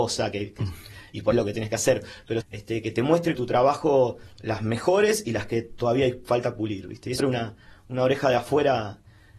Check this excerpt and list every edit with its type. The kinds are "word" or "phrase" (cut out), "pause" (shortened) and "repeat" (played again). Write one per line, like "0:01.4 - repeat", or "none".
0:01.3 - phrase
0:02.4 - word
0:03.3 - phrase
0:04.3 - pause
0:07.2 - word